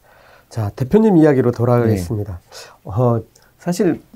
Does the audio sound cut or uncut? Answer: cut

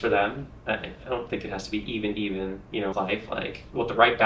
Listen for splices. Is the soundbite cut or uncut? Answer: cut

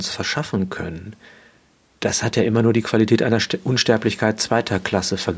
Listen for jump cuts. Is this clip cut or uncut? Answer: uncut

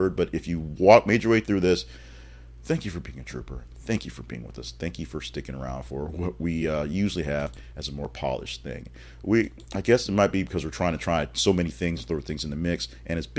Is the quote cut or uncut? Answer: uncut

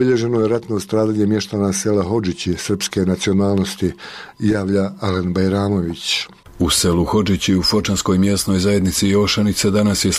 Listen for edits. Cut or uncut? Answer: uncut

